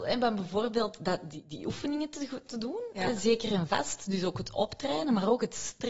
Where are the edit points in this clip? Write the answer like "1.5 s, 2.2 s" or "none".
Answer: none